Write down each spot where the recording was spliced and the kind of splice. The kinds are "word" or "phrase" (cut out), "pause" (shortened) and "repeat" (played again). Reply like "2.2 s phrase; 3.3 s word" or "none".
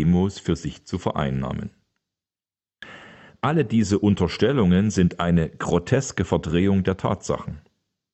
none